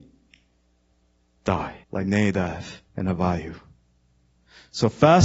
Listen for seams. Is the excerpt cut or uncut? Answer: cut